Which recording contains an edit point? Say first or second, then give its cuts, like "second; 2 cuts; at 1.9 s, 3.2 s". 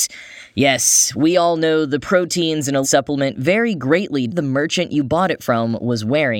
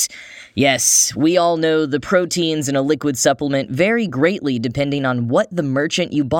first; 2 cuts; at 2.8 s, 4.3 s